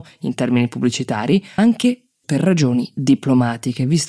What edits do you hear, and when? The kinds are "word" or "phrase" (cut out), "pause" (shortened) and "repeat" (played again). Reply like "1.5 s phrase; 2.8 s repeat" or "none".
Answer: 1.6 s word; 2.2 s word